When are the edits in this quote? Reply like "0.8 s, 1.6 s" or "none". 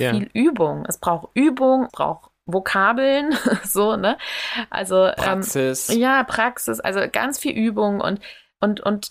1.9 s